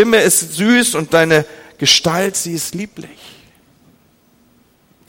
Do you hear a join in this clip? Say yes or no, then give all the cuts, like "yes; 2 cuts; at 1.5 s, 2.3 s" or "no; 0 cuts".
no; 0 cuts